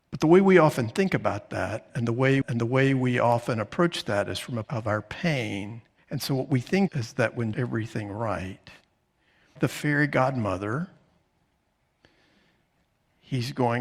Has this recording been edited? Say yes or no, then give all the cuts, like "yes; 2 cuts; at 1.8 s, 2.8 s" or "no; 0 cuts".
yes; 6 cuts; at 2.4 s, 4.6 s, 6.0 s, 6.9 s, 7.5 s, 9.6 s